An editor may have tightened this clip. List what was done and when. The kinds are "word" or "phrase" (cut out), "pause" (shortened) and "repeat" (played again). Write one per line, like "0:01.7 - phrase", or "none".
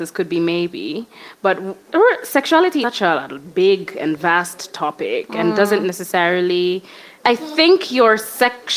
0:02.8 - word
0:07.2 - pause